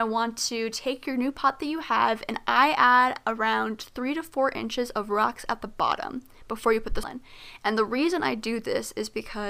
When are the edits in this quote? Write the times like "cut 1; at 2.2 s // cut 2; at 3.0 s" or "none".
cut 1; at 7.0 s